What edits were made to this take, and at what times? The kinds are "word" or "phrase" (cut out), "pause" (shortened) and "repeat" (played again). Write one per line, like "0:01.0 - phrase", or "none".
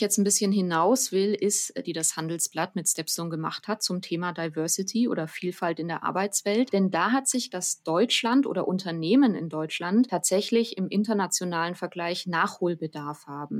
0:01.8 - phrase
0:07.5 - word